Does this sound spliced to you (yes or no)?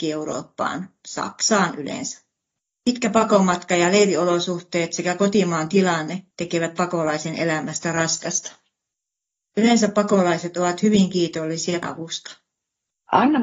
yes